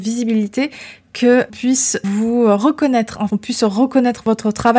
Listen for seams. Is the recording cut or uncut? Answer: cut